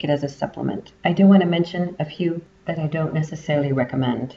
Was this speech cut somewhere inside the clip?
yes; 1 cut; at 1.0 s

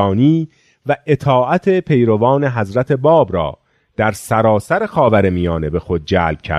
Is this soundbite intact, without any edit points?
yes; 0 cuts

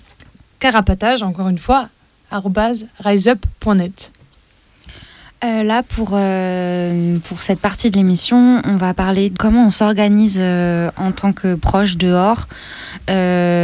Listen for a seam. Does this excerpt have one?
yes; 1 cut; at 9.4 s

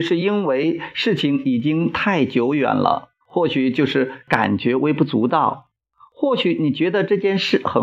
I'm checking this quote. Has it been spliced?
yes; 2 cuts; at 3.2 s, 5.9 s

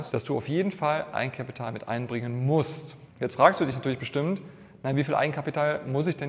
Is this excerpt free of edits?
yes; 0 cuts

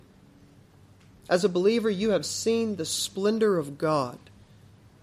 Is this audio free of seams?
yes; 0 cuts

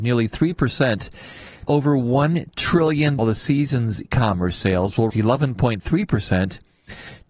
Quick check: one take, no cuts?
no; 4 cuts; at 1.7 s, 3.2 s, 4.0 s, 5.1 s

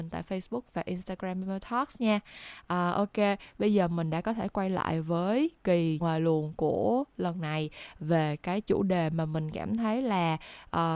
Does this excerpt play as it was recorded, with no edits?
no; 1 cut; at 6.0 s

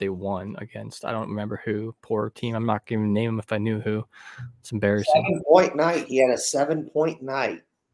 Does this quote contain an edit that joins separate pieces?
no; 0 cuts

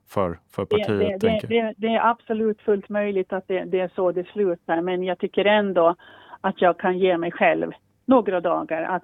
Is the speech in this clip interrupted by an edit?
no; 0 cuts

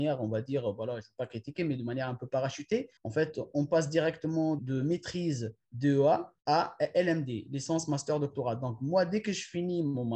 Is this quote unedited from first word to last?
no; 3 cuts; at 3.0 s, 4.6 s, 6.4 s

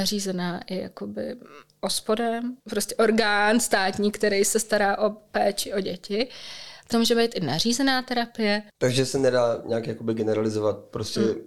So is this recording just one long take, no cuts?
no; 3 cuts; at 2.6 s, 6.9 s, 8.7 s

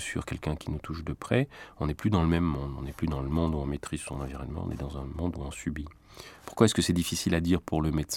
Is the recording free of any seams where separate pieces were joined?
yes; 0 cuts

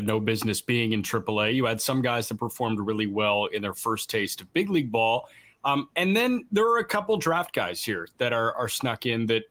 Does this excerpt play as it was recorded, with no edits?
yes; 0 cuts

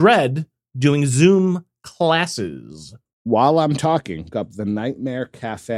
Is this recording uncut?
no; 2 cuts; at 3.0 s, 4.3 s

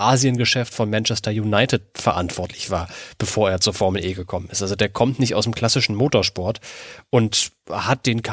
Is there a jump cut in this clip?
no; 0 cuts

